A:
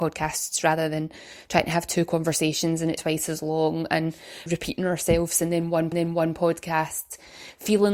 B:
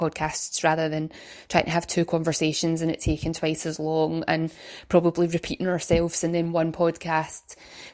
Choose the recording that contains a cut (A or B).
A